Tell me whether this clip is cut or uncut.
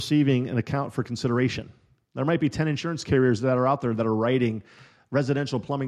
uncut